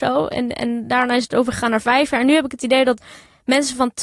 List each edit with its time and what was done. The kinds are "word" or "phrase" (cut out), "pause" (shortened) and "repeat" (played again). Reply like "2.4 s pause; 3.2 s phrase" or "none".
none